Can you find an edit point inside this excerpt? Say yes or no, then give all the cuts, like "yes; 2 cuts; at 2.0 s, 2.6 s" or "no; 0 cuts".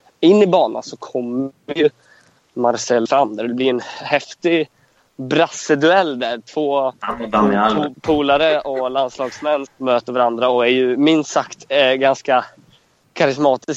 yes; 3 cuts; at 3.1 s, 7.9 s, 9.7 s